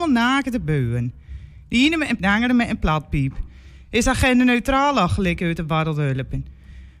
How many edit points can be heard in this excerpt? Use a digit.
1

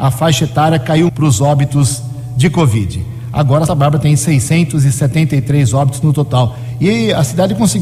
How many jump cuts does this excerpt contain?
2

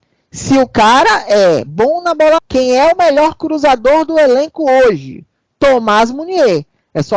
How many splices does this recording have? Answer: 1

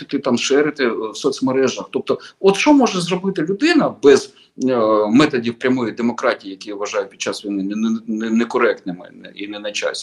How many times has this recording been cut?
0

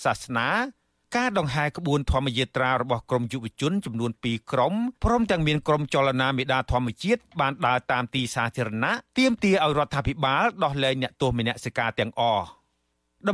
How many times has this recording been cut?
2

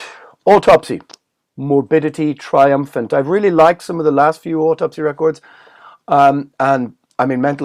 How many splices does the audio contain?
0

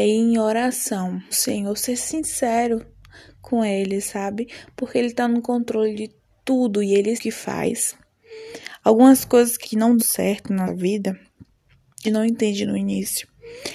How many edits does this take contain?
6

